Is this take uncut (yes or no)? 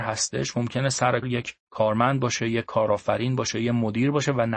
no